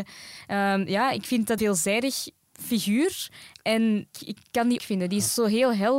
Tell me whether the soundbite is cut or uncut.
cut